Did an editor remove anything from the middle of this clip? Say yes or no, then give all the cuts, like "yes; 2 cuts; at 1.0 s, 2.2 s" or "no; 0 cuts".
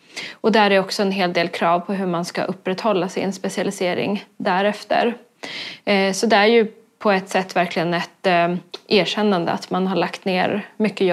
no; 0 cuts